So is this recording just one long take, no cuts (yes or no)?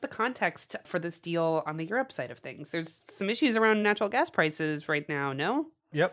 yes